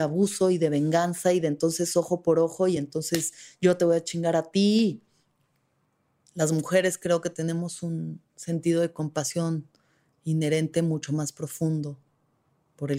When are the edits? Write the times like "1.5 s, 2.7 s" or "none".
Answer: none